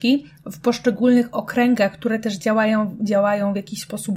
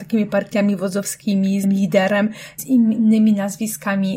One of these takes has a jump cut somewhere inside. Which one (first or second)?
second